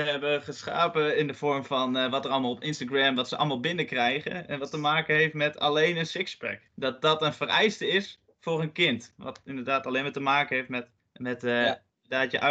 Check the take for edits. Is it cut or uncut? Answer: cut